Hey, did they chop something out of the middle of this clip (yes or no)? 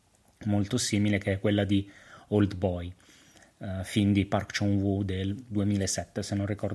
no